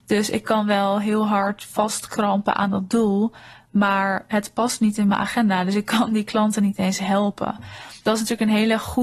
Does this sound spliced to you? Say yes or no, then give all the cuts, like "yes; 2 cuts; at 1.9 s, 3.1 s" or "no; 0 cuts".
no; 0 cuts